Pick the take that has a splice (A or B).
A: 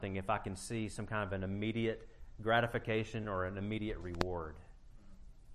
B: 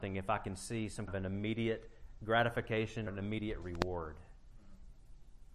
B